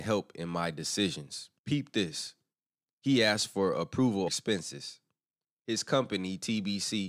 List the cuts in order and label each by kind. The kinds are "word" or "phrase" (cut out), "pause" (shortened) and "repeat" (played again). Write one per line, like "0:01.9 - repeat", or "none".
0:01.6 - pause
0:04.3 - word